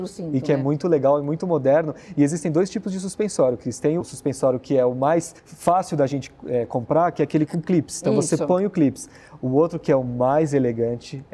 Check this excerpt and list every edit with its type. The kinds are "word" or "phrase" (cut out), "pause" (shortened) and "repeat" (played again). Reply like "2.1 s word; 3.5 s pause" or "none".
4.0 s word; 5.4 s pause